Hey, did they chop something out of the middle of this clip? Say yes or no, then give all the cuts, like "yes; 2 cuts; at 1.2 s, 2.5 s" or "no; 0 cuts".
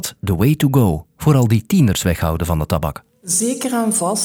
no; 0 cuts